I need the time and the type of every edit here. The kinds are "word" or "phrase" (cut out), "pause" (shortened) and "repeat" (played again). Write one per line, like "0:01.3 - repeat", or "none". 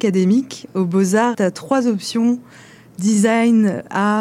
0:01.3 - word